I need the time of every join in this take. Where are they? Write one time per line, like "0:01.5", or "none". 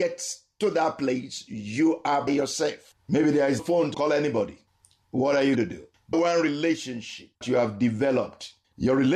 0:02.3
0:03.6
0:03.9
0:05.6
0:06.1
0:07.4

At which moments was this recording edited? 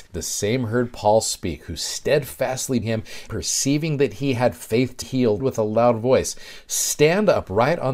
0:02.8
0:03.3
0:05.0
0:05.4

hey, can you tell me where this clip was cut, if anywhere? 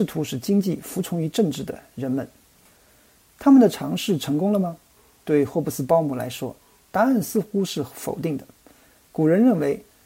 none

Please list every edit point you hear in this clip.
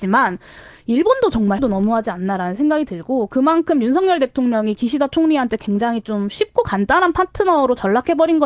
0:01.6

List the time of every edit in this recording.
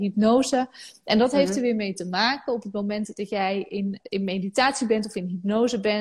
0:04.0

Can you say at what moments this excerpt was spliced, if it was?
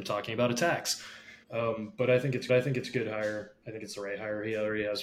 0:01.4
0:02.5

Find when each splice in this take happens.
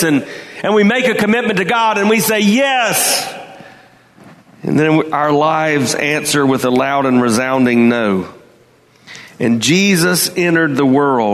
none

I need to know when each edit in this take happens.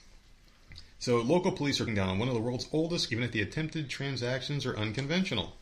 0:00.9
0:01.9
0:03.1

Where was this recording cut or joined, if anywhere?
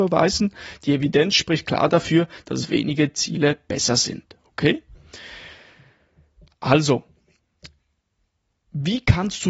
none

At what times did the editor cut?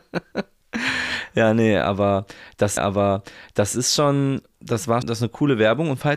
0:02.8
0:05.0

